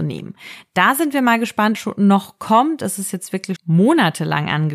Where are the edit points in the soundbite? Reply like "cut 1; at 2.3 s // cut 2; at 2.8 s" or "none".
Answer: cut 1; at 1.7 s // cut 2; at 3.6 s